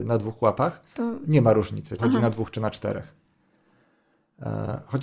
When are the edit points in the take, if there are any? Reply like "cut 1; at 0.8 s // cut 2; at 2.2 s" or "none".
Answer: cut 1; at 2.0 s